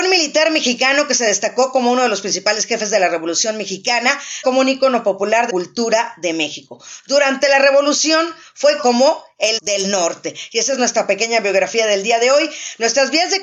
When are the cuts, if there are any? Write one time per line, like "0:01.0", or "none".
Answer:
0:04.4
0:05.5
0:08.8
0:09.6